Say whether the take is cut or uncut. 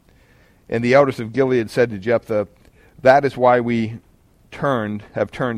uncut